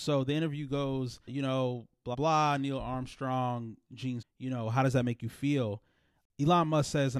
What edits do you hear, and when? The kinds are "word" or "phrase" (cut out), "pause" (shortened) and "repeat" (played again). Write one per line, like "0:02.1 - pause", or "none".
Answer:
0:01.3 - word
0:02.1 - word
0:04.2 - word